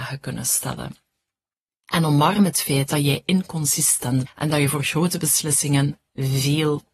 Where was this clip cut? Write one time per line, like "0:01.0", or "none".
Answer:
0:04.3